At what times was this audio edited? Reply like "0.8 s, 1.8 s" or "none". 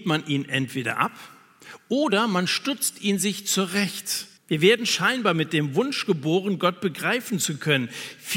4.4 s